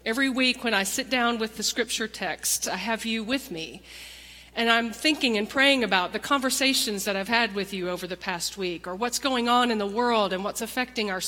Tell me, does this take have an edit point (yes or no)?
no